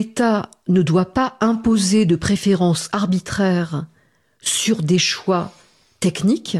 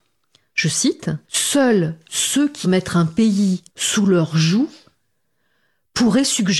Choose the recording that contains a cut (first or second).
second